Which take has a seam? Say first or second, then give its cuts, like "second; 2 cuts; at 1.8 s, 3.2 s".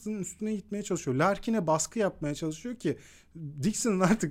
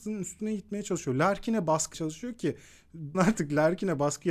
second; 2 cuts; at 1.9 s, 3.1 s